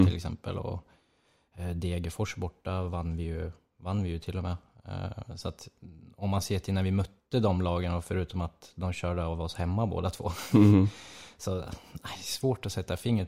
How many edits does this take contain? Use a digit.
0